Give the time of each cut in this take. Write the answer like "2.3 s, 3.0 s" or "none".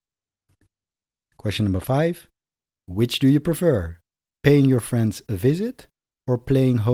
none

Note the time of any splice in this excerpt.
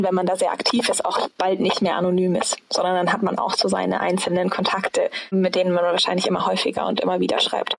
none

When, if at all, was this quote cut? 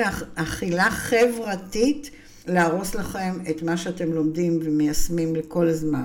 2.4 s

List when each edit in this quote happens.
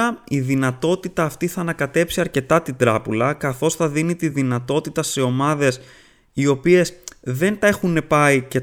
none

